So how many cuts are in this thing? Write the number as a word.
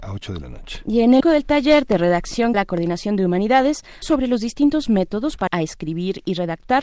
four